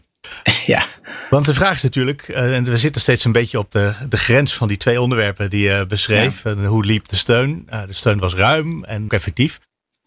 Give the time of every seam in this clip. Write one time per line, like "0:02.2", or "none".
0:09.1